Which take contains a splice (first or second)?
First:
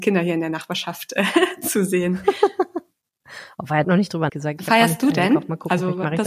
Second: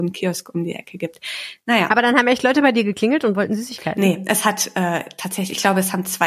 first